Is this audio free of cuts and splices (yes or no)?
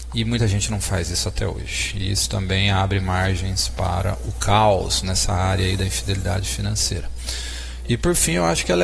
yes